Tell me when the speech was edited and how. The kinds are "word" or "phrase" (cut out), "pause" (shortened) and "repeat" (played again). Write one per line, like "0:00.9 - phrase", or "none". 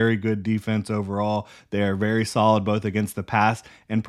none